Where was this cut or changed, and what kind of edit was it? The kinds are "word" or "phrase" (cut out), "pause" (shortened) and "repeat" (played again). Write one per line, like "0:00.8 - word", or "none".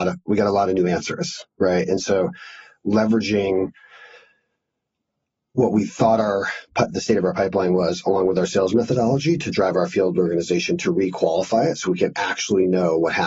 none